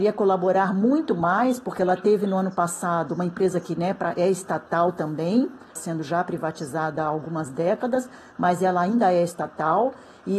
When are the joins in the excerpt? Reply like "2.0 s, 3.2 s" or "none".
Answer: 5.8 s